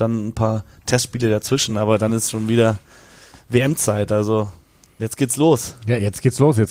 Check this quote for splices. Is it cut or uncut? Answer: uncut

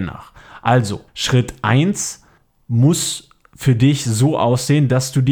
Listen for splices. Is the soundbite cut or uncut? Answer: cut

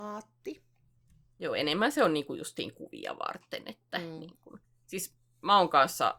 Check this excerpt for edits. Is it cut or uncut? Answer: cut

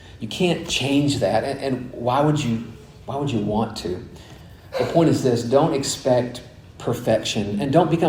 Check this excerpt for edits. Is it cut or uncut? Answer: uncut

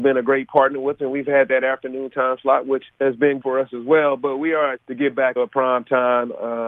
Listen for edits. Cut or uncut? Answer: cut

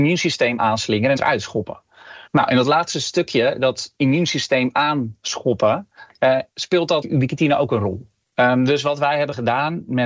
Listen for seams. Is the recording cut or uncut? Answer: cut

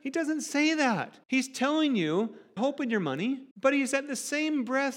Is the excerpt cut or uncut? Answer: cut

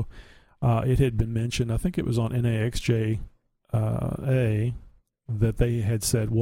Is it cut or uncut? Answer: uncut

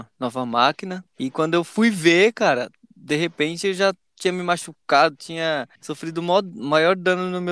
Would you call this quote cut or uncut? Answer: cut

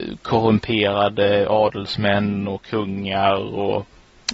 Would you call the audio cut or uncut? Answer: uncut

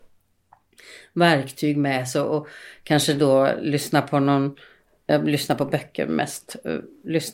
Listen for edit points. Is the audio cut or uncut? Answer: uncut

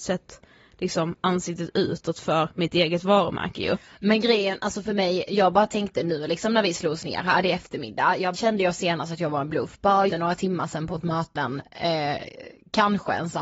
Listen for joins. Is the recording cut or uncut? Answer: cut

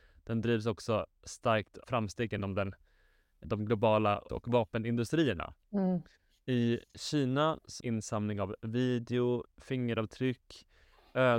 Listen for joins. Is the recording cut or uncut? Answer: cut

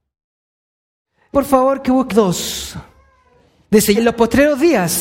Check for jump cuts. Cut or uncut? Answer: cut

